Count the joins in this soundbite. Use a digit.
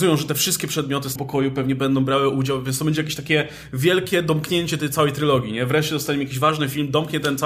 1